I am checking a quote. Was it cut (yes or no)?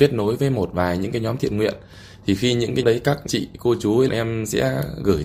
yes